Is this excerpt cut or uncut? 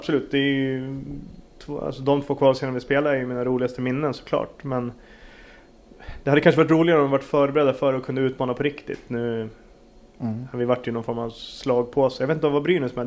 uncut